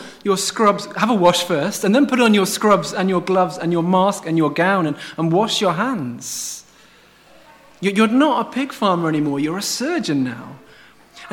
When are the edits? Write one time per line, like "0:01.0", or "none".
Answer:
none